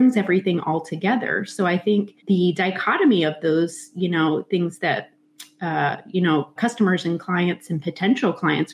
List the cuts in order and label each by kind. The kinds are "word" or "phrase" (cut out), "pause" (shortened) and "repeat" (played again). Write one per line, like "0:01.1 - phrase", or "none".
0:02.2 - pause
0:06.6 - word